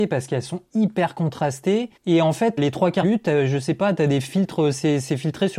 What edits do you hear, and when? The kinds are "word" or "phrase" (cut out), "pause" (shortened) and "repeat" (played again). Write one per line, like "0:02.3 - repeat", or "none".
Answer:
0:02.0 - pause
0:02.6 - word
0:03.0 - word